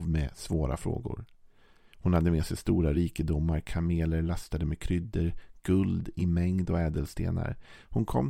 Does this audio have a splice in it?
no; 0 cuts

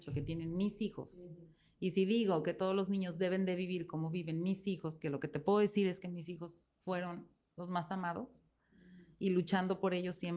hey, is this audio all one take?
yes; 0 cuts

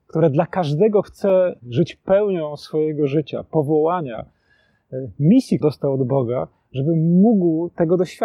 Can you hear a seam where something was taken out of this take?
yes; 3 cuts; at 1.0 s, 1.6 s, 5.6 s

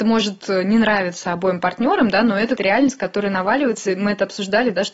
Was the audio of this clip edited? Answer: yes; 1 cut; at 2.6 s

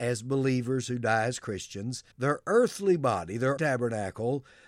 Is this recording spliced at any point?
yes; 2 cuts; at 2.1 s, 3.6 s

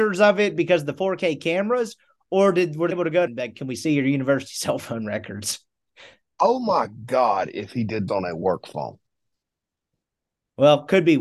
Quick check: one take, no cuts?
no; 3 cuts; at 2.9 s, 3.3 s, 8.1 s

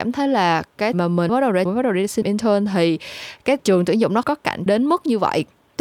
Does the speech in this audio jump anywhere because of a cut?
yes; 7 cuts; at 0.9 s, 1.3 s, 1.7 s, 2.2 s, 3.6 s, 4.2 s, 4.7 s

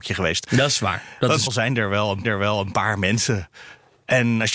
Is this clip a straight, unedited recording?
no; 2 cuts; at 1.5 s, 2.2 s

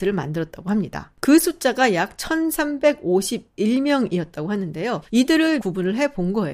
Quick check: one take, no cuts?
no; 1 cut; at 5.6 s

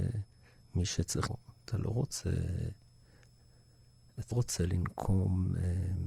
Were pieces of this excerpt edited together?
yes; 2 cuts; at 1.3 s, 4.3 s

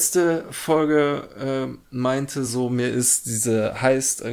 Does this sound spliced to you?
no; 0 cuts

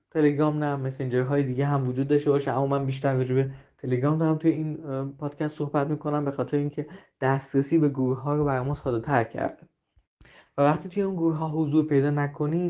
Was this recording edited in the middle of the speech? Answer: no; 0 cuts

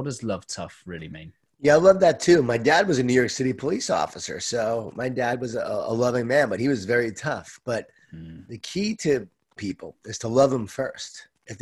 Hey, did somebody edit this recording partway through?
yes; 1 cut; at 9.6 s

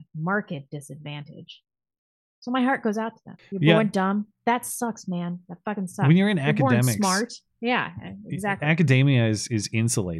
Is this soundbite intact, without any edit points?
yes; 0 cuts

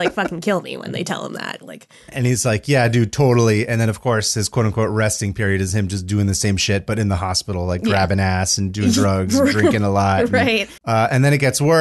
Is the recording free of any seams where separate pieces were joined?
no; 1 cut; at 10.8 s

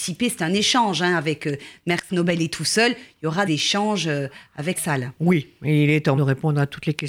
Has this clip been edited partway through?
yes; 4 cuts; at 2.1 s, 3.5 s, 4.8 s, 6.2 s

